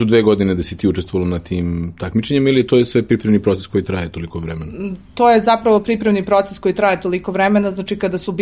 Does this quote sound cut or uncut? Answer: uncut